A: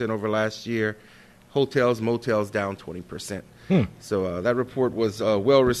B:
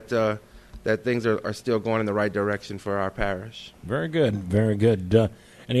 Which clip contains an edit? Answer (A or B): B